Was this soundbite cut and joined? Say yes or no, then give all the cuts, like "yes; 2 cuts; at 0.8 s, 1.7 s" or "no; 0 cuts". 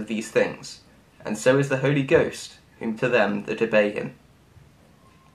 yes; 1 cut; at 3.0 s